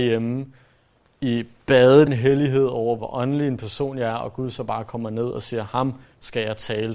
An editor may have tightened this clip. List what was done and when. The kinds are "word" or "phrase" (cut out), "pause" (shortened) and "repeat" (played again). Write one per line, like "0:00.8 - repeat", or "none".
0:02.1 - phrase
0:03.0 - word